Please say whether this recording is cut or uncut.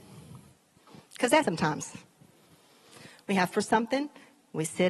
cut